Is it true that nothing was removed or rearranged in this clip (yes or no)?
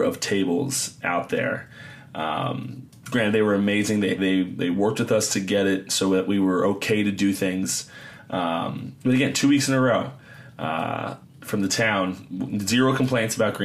no